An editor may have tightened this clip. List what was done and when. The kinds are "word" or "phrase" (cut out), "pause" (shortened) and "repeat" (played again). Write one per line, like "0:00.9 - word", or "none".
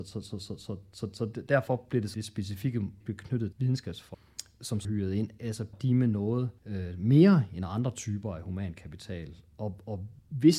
0:02.1 - word
0:03.0 - phrase
0:03.5 - word
0:04.8 - word
0:05.7 - word
0:06.6 - pause

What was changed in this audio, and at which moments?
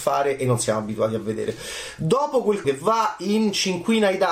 0:02.6 - word

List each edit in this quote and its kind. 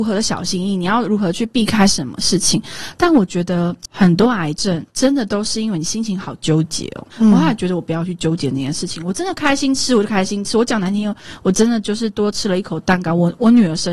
0:04.9 - pause
0:07.1 - pause

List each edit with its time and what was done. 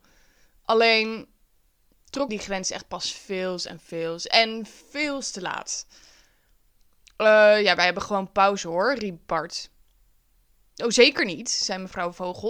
0:02.3 - word

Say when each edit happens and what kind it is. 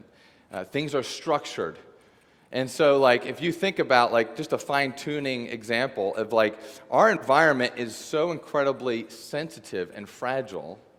none

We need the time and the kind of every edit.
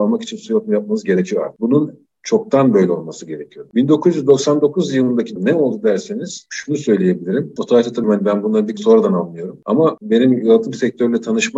0:05.4 - phrase
0:08.0 - word
0:08.8 - word

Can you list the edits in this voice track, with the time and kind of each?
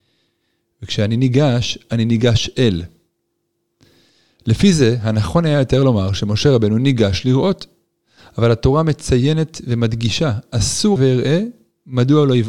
0:11.0 - word

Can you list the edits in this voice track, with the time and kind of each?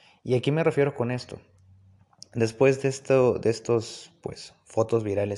none

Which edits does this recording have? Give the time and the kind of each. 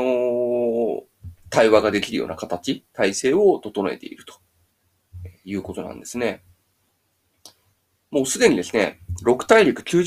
none

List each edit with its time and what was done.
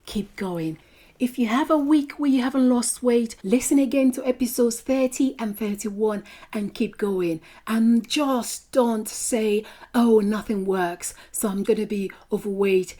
0:03.4 - pause
0:11.6 - word

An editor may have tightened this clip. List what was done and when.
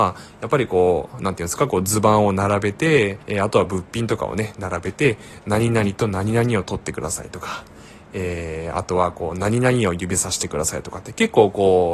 0:03.2 - pause

